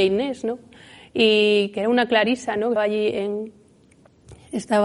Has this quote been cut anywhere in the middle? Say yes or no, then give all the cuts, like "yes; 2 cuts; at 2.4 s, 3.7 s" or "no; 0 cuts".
yes; 1 cut; at 2.8 s